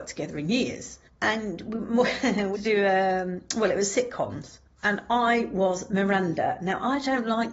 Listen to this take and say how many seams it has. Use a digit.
2